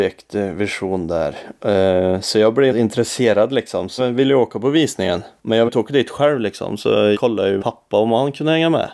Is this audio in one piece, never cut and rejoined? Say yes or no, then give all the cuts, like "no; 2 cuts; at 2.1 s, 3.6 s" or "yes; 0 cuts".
no; 5 cuts; at 2.7 s, 4.0 s, 5.7 s, 7.1 s, 7.6 s